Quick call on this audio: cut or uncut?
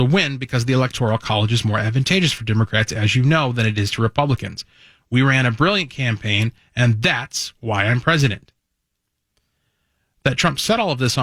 uncut